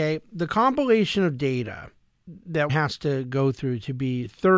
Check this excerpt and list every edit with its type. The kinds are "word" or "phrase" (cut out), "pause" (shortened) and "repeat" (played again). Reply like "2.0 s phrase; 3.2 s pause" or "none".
2.7 s word